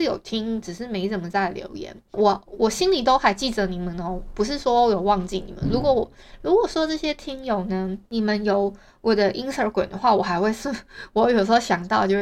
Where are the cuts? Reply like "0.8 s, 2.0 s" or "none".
none